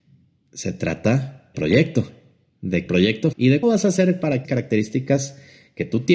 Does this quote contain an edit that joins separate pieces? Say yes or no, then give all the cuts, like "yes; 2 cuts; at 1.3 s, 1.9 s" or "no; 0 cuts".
yes; 5 cuts; at 1.5 s, 2.9 s, 3.3 s, 3.6 s, 4.4 s